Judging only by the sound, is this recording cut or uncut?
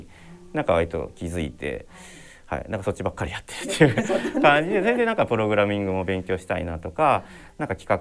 uncut